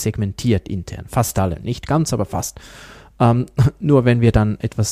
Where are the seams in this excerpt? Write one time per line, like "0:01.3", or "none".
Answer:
none